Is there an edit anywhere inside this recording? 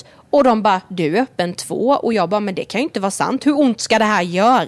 no; 0 cuts

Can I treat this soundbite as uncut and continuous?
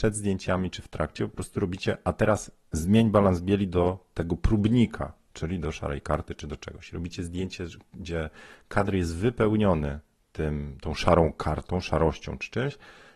yes; 0 cuts

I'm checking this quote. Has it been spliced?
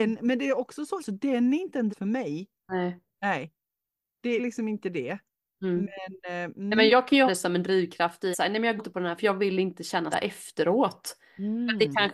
yes; 9 cuts; at 1.0 s, 1.9 s, 4.4 s, 6.9 s, 7.3 s, 8.3 s, 8.8 s, 9.2 s, 10.1 s

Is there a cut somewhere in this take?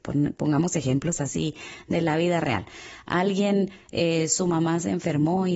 no; 0 cuts

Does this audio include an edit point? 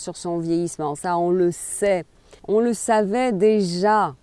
yes; 1 cut; at 2.4 s

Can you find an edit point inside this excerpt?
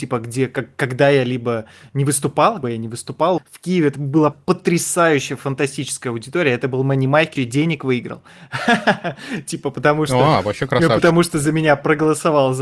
yes; 4 cuts; at 2.6 s, 3.4 s, 4.3 s, 7.4 s

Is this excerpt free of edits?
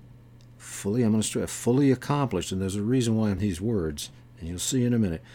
no; 1 cut; at 3.4 s

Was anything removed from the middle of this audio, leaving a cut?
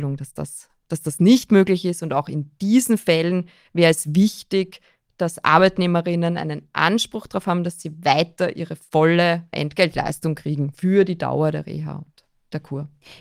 yes; 1 cut; at 9.5 s

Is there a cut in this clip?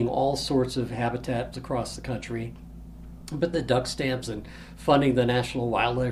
yes; 3 cuts; at 1.5 s, 3.5 s, 4.2 s

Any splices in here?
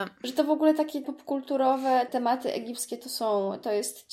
yes; 2 cuts; at 1.0 s, 2.1 s

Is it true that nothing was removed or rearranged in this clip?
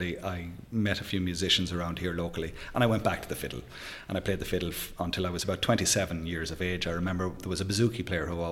yes; 0 cuts

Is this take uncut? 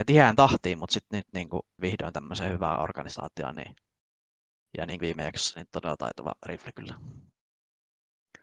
no; 3 cuts; at 1.8 s, 5.0 s, 5.7 s

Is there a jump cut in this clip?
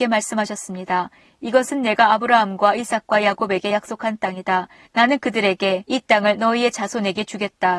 no; 0 cuts

